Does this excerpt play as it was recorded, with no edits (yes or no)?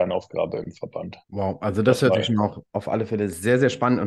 no